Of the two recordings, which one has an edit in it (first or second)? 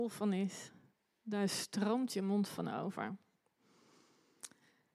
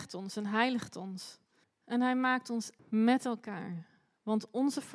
second